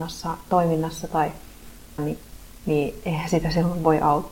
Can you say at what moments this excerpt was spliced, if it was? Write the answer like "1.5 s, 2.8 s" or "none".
2.0 s